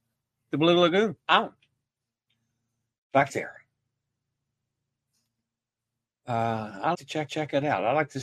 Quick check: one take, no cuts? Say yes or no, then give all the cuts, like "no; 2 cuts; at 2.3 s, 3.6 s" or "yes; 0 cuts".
no; 4 cuts; at 1.2 s, 3.3 s, 6.9 s, 7.3 s